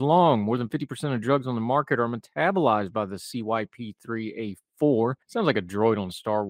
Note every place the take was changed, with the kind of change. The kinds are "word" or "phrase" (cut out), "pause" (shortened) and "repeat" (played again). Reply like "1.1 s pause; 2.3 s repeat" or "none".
5.2 s pause